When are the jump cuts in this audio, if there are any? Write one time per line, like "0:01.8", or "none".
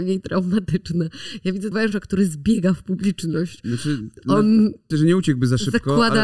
0:01.7
0:04.9